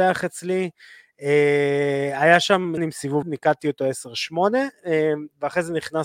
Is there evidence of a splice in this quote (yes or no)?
yes